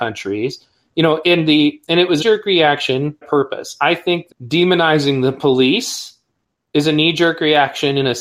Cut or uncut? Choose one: cut